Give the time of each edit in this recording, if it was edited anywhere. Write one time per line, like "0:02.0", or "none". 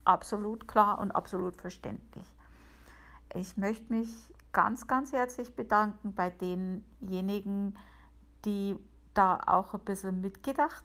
none